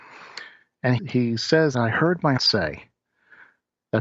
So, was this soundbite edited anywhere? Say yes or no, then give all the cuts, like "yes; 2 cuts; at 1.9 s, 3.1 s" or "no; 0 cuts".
yes; 3 cuts; at 1.0 s, 1.7 s, 2.4 s